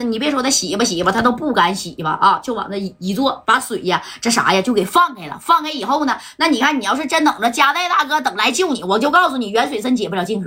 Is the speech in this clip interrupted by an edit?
yes; 1 cut; at 3.4 s

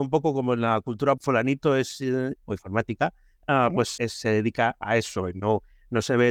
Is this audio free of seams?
no; 3 cuts; at 1.2 s, 2.4 s, 4.0 s

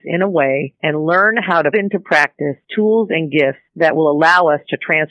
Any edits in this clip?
yes; 3 cuts; at 1.7 s, 2.6 s, 3.7 s

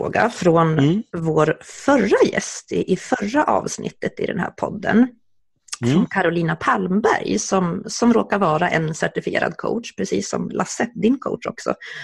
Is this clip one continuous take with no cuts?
yes; 0 cuts

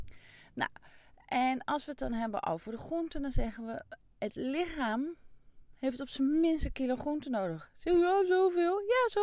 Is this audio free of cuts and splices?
yes; 0 cuts

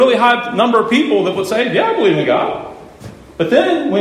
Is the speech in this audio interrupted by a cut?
no; 0 cuts

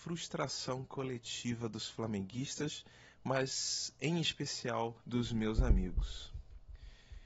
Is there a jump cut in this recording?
yes; 1 cut; at 5.0 s

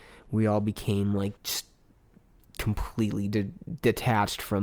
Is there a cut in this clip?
yes; 1 cut; at 1.4 s

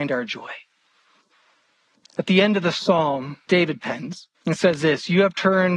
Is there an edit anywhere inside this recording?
yes; 2 cuts; at 3.5 s, 4.3 s

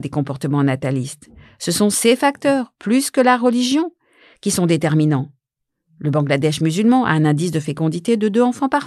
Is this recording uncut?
yes; 0 cuts

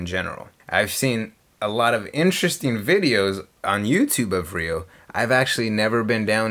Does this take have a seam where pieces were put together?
no; 0 cuts

